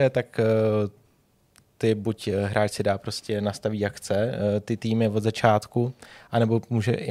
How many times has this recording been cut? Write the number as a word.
zero